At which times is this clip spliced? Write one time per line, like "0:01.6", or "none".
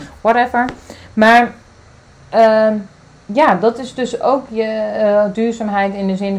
none